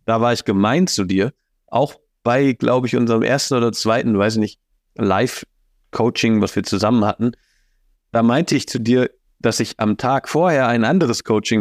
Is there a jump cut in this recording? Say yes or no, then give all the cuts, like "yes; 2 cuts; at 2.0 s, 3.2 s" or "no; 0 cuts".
no; 0 cuts